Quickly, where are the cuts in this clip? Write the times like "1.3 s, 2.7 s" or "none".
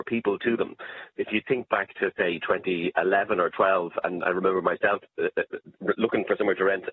1.2 s